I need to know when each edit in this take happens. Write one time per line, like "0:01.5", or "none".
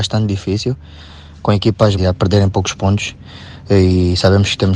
0:02.0